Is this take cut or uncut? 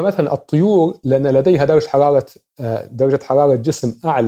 uncut